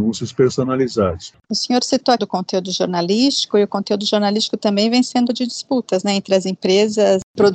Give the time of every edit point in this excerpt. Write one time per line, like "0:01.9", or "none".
0:01.4
0:02.2
0:05.3